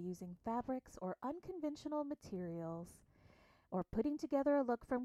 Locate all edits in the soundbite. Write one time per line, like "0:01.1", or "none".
none